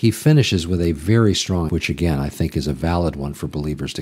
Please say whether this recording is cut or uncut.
cut